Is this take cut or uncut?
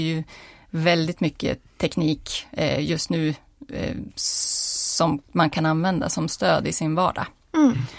uncut